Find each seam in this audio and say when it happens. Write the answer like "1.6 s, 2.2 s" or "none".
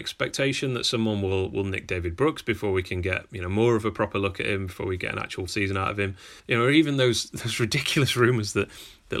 5.5 s, 6.4 s

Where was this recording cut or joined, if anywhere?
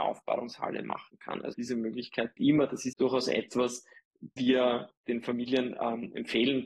1.5 s, 2.4 s, 2.9 s, 4.4 s

